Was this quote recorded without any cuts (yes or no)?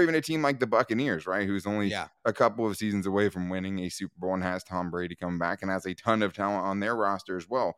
yes